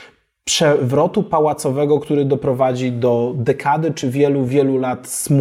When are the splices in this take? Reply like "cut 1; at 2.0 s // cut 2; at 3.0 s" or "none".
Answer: none